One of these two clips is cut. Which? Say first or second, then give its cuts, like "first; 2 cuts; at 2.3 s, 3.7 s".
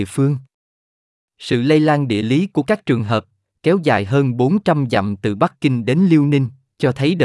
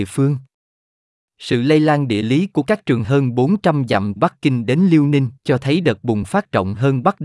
second; 3 cuts; at 3.0 s, 4.2 s, 5.4 s